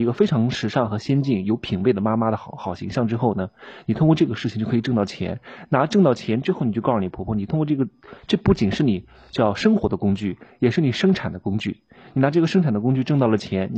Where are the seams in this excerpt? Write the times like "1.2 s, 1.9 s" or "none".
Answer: none